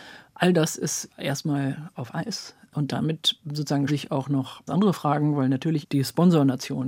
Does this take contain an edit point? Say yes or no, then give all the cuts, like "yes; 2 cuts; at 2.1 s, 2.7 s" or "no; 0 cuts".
yes; 5 cuts; at 1.1 s, 1.9 s, 3.9 s, 4.7 s, 5.8 s